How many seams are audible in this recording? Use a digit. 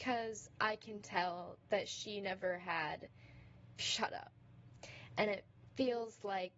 1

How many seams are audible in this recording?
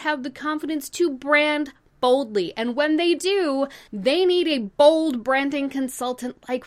1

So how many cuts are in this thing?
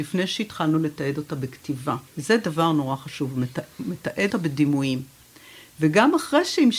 2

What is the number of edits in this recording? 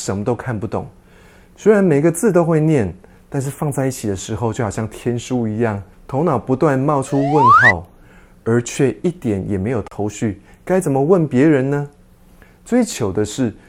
1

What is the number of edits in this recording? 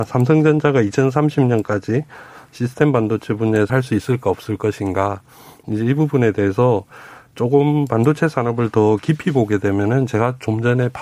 1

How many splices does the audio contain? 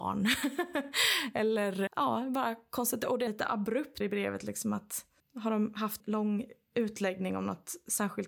5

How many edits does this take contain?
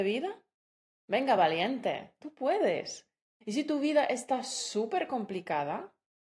0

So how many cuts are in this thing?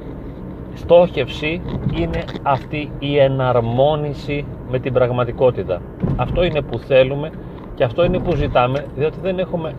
0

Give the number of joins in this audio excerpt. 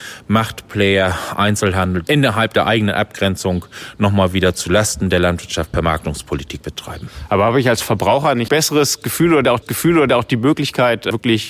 3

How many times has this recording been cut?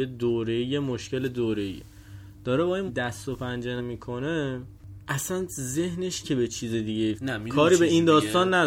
4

